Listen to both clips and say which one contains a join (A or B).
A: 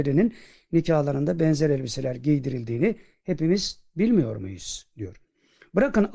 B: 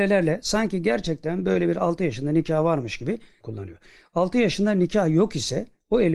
B